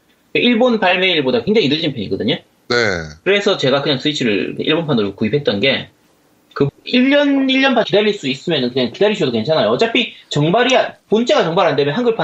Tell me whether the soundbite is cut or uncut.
cut